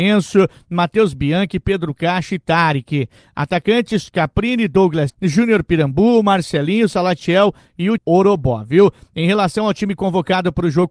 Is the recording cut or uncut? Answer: cut